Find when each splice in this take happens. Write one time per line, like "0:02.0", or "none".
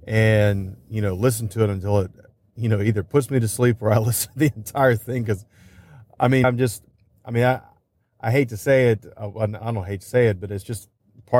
0:06.4